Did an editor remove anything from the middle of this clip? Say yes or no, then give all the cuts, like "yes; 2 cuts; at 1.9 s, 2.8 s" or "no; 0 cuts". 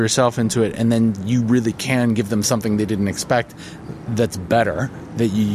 no; 0 cuts